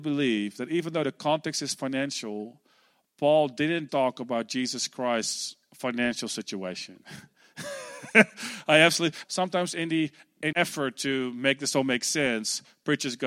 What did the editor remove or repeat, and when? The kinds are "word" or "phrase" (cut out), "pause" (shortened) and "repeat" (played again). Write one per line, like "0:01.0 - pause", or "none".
0:03.9 - word
0:09.2 - word
0:10.5 - word